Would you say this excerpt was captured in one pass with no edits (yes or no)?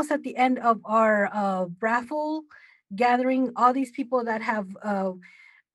yes